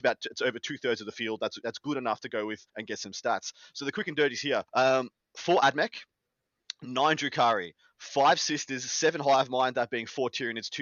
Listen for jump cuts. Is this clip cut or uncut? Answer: cut